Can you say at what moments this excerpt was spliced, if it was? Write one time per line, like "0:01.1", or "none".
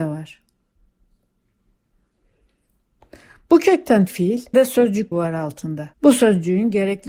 0:04.1
0:04.5
0:05.1
0:05.9